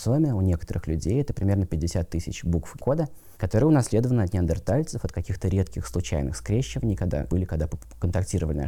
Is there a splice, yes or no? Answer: yes